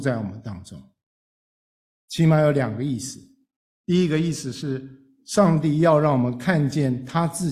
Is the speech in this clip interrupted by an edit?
no; 0 cuts

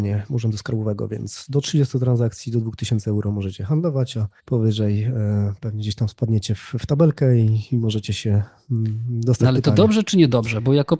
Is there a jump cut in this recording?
yes; 1 cut; at 4.4 s

